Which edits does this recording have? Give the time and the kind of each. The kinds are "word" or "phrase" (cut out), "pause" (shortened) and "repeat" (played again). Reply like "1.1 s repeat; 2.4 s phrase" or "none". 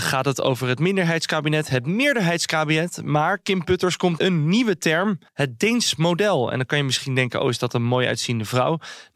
4.2 s word; 5.3 s pause